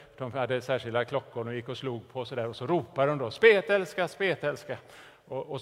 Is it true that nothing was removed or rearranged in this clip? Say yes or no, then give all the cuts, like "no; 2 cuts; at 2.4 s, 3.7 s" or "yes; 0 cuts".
yes; 0 cuts